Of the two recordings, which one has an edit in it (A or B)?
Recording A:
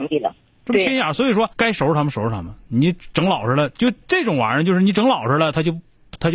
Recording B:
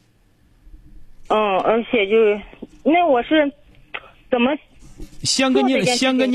A